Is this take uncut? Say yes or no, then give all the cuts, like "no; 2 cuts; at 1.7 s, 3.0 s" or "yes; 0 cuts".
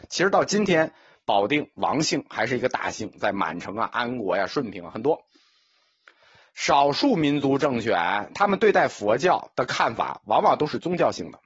yes; 0 cuts